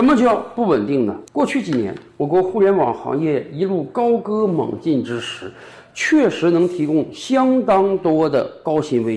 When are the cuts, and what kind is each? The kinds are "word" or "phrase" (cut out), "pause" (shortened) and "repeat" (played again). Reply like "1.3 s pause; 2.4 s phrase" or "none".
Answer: 1.3 s pause